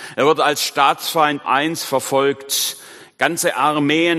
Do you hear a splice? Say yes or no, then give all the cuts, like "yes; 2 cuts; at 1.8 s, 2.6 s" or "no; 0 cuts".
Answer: yes; 1 cut; at 1.4 s